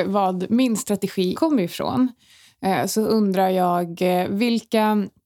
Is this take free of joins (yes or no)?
no